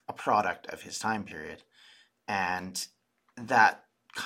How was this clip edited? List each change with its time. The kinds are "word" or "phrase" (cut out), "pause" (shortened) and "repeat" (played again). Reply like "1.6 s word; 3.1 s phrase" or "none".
none